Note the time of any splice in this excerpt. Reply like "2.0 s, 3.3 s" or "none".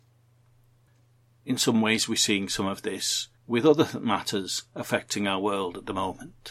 3.4 s